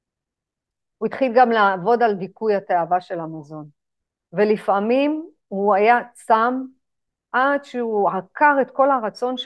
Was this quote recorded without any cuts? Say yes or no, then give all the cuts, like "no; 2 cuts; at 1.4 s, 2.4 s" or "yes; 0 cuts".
yes; 0 cuts